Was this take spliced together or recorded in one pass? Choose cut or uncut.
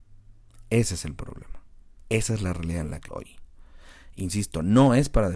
cut